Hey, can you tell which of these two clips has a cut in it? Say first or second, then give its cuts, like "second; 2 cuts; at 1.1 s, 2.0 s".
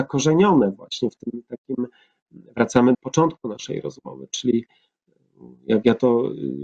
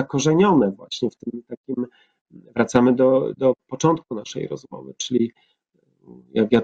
first; 1 cut; at 2.9 s